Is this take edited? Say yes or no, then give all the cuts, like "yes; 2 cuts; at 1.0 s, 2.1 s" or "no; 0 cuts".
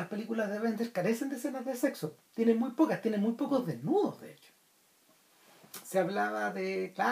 yes; 1 cut; at 2.3 s